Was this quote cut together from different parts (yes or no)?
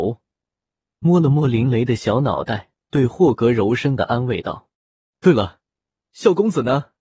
yes